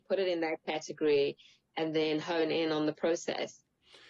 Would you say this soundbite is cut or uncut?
uncut